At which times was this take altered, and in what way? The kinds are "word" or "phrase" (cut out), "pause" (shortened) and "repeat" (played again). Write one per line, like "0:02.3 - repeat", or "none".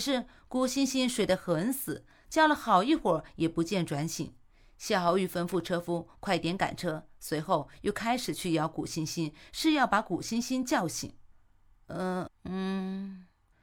0:12.3 - word